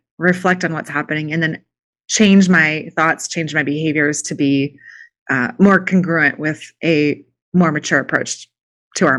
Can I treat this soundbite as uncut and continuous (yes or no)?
yes